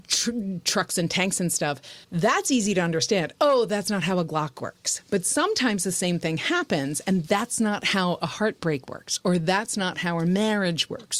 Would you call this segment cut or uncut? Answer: cut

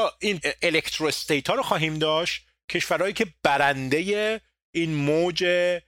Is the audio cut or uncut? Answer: uncut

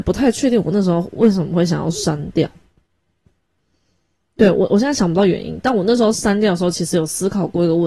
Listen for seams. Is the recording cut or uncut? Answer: uncut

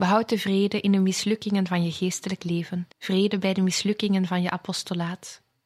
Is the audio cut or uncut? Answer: cut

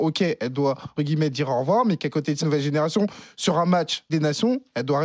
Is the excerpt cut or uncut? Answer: cut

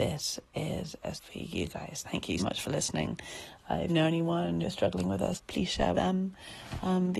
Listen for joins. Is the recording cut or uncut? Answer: cut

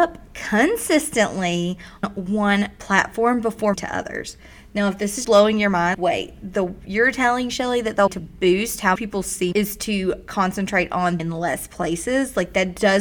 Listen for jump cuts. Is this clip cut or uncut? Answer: cut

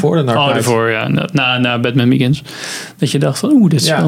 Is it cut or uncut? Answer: uncut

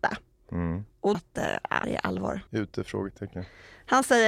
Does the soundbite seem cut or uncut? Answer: cut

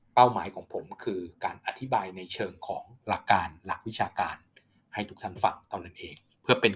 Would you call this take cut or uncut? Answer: uncut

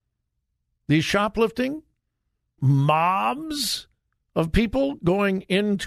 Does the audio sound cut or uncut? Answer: cut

